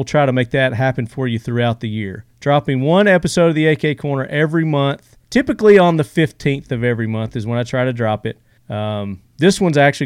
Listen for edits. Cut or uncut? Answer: cut